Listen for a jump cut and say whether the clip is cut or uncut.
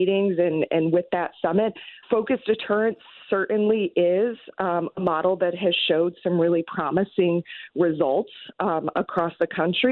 cut